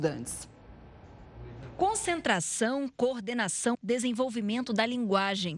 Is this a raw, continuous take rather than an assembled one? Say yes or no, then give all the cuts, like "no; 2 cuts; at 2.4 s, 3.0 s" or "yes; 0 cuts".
no; 1 cut; at 3.7 s